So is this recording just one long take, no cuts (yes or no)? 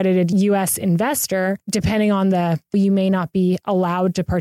no